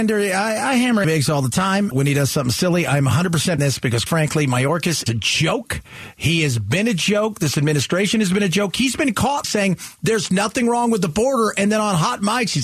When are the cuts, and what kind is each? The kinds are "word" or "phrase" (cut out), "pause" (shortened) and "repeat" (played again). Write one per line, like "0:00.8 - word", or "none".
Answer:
0:01.0 - word
0:01.9 - word
0:03.6 - word
0:04.1 - word
0:05.1 - word
0:09.4 - word